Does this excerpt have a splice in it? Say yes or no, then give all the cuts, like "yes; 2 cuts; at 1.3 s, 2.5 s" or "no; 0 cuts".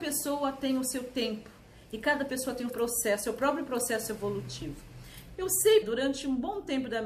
yes; 2 cuts; at 2.7 s, 5.8 s